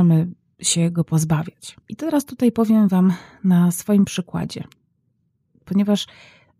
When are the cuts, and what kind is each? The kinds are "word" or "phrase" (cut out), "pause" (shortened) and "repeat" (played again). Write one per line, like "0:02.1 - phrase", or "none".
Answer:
0:01.8 - pause